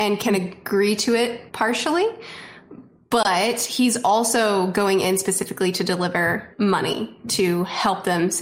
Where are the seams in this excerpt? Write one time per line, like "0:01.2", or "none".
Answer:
0:01.5
0:06.5